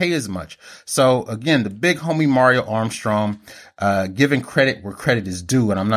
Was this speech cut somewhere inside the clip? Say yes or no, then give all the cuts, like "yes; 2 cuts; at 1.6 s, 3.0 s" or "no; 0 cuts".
no; 0 cuts